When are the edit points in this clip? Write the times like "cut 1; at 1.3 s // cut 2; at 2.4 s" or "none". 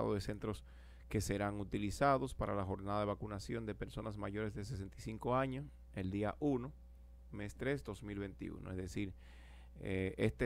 none